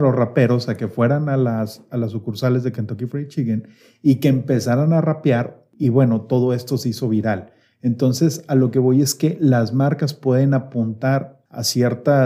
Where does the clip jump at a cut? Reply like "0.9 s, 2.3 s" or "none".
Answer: none